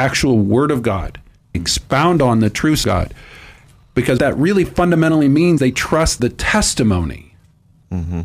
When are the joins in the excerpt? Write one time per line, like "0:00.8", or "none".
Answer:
0:01.5
0:02.8
0:04.2
0:05.6
0:06.2